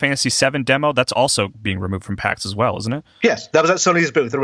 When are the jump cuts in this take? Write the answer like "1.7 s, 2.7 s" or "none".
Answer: none